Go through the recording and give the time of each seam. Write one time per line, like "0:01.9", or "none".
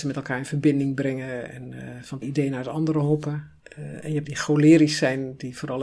0:01.5
0:02.2
0:04.2